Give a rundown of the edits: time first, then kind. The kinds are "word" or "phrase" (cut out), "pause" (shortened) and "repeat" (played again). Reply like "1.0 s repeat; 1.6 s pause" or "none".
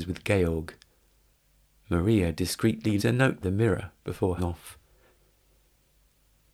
3.0 s word; 3.4 s word; 4.4 s word